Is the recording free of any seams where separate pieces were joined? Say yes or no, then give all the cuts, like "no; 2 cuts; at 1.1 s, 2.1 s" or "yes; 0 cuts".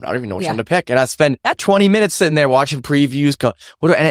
yes; 0 cuts